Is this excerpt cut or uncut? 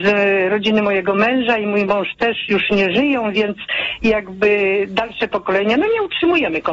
uncut